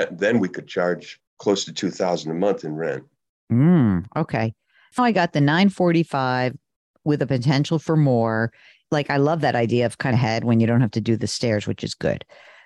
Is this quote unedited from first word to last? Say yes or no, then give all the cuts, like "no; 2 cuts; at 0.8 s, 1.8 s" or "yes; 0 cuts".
no; 3 cuts; at 1.3 s, 5.0 s, 10.1 s